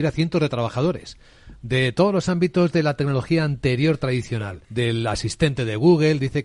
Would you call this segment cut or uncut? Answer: cut